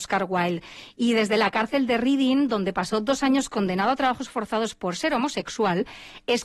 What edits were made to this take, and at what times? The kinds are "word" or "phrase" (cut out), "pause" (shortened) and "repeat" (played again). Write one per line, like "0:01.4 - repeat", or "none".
none

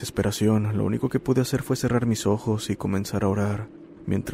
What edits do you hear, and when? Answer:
none

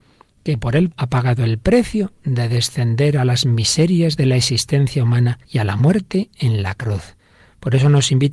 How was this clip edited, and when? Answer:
0:00.9 - word
0:05.4 - pause

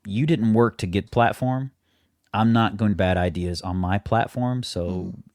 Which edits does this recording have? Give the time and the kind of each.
0:01.1 - word
0:02.9 - phrase

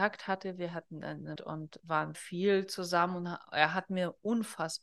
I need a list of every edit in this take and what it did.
0:01.4 - word
0:02.1 - phrase

